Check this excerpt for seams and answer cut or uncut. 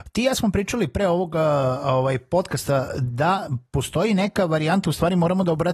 uncut